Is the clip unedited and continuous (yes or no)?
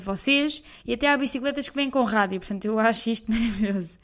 yes